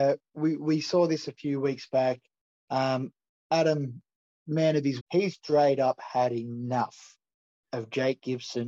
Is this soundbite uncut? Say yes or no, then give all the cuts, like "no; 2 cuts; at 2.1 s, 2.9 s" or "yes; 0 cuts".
no; 2 cuts; at 5.0 s, 5.3 s